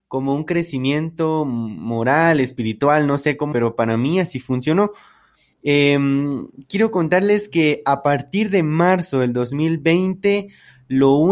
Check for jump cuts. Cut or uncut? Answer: cut